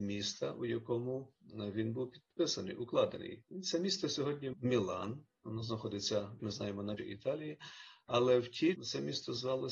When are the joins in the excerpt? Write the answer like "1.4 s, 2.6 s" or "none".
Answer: 4.5 s, 6.4 s, 7.0 s, 8.7 s